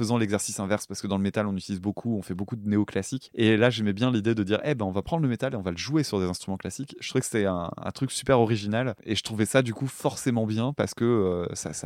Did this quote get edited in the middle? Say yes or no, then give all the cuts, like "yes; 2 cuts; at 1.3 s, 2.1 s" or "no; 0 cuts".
no; 0 cuts